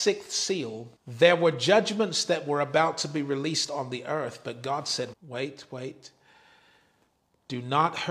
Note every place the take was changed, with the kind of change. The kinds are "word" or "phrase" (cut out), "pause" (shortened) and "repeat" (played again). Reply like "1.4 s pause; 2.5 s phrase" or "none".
1.0 s pause; 5.1 s word